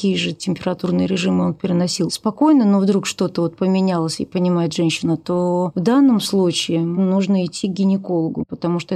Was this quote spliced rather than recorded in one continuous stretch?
no; 0 cuts

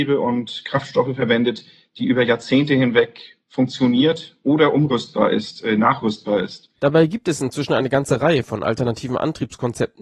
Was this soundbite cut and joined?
no; 0 cuts

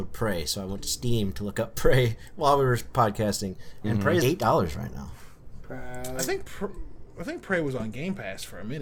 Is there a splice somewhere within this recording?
yes; 1 cut; at 4.2 s

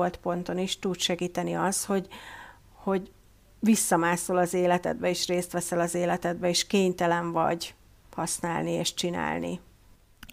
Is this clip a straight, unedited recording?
yes; 0 cuts

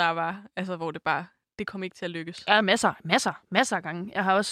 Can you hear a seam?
no; 0 cuts

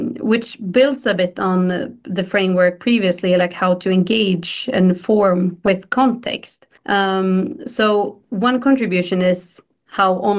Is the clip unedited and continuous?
no; 1 cut; at 6.8 s

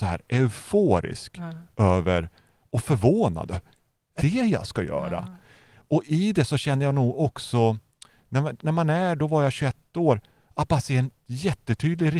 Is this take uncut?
no; 1 cut; at 4.2 s

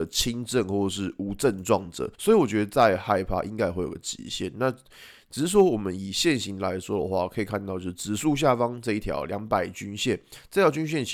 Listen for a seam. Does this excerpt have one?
yes; 1 cut; at 2.1 s

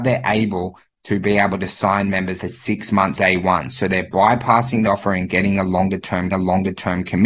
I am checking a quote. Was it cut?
yes; 4 cuts; at 2.4 s, 3.1 s, 4.9 s, 6.3 s

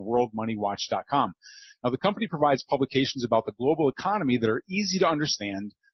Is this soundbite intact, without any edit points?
yes; 0 cuts

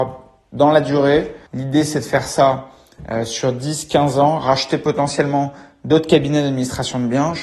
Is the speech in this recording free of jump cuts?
no; 1 cut; at 1.5 s

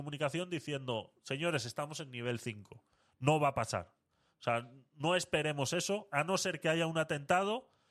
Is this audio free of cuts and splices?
yes; 0 cuts

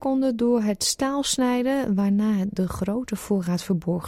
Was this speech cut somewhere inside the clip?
no; 0 cuts

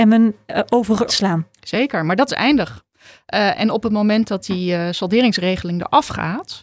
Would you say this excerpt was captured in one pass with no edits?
no; 1 cut; at 1.1 s

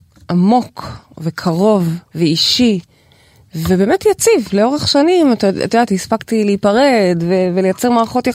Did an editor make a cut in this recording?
yes; 1 cut; at 2.1 s

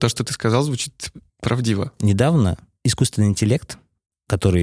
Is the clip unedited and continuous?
no; 1 cut; at 1.3 s

